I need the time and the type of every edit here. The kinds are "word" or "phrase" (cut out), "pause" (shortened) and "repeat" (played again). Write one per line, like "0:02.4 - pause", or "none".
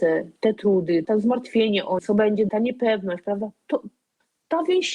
0:01.0 - word
0:02.0 - word
0:02.5 - word